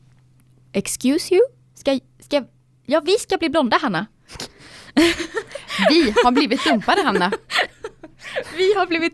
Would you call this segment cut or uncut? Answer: uncut